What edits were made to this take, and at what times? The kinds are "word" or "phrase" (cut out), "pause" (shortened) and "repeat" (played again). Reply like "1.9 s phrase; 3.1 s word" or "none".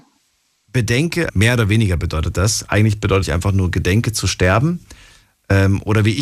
1.3 s word; 3.2 s phrase

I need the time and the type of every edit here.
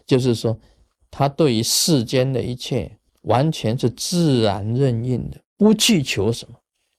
3.1 s pause

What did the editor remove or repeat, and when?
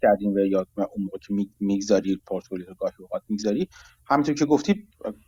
none

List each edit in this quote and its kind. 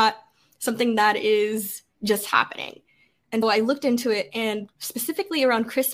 3.4 s word; 4.8 s pause

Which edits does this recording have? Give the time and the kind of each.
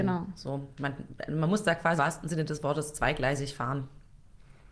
2.0 s word

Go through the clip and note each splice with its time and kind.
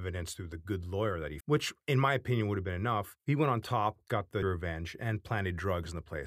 1.4 s word; 3.2 s pause; 4.4 s word

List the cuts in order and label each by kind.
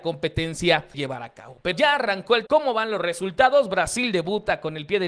0.9 s word; 1.7 s word; 2.5 s word

